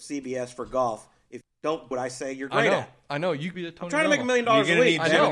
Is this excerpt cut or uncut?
cut